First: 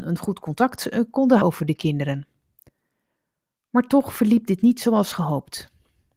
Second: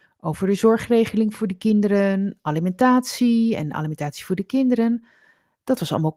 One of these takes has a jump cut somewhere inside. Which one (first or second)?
first